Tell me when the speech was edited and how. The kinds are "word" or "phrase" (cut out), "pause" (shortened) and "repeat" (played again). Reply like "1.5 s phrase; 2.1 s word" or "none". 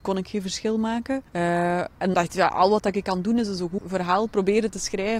1.3 s pause; 2.1 s word; 3.8 s word